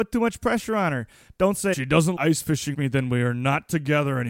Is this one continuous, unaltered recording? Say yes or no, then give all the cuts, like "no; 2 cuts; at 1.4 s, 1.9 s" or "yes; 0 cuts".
no; 3 cuts; at 1.7 s, 2.2 s, 2.7 s